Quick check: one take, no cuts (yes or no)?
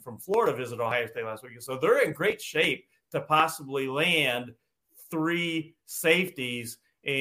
yes